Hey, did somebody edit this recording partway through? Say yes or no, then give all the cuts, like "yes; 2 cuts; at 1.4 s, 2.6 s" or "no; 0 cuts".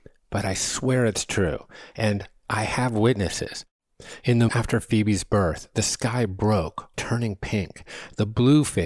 yes; 2 cuts; at 4.5 s, 6.9 s